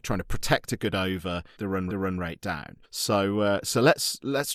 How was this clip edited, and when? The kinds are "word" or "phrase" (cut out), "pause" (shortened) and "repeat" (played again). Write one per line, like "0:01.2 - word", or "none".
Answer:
0:01.6 - word
0:01.9 - repeat
0:02.8 - pause